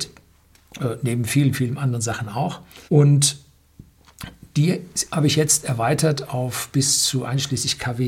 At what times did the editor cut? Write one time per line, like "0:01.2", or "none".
0:02.9